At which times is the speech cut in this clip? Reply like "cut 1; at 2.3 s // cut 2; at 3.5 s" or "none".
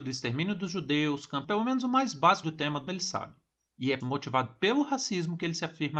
cut 1; at 1.4 s // cut 2; at 2.4 s // cut 3; at 2.9 s // cut 4; at 4.0 s